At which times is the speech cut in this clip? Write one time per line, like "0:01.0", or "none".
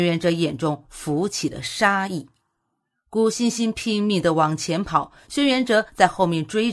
none